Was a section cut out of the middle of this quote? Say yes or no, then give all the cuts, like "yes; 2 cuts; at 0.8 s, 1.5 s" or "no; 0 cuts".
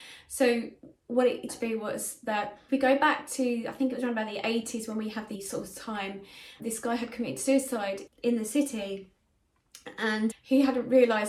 yes; 6 cuts; at 1.5 s, 2.7 s, 5.3 s, 6.6 s, 8.1 s, 10.3 s